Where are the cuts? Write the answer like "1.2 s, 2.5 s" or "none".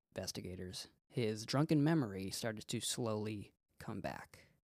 none